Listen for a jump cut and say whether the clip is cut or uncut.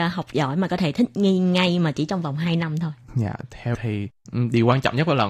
cut